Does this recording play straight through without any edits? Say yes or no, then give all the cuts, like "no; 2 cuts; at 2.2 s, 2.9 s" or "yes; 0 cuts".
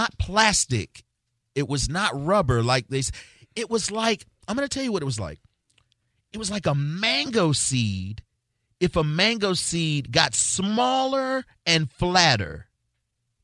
yes; 0 cuts